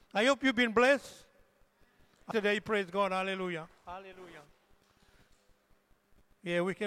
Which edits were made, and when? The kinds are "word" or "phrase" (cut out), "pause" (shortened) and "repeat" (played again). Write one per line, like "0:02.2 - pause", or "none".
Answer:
0:02.3 - phrase
0:03.8 - pause